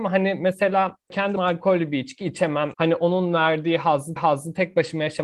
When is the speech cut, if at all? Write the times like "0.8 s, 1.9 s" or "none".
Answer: 1.4 s, 2.7 s, 4.2 s